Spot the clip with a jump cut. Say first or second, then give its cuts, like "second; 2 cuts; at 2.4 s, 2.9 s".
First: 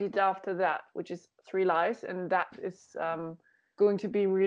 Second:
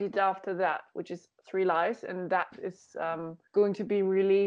second; 1 cut; at 3.5 s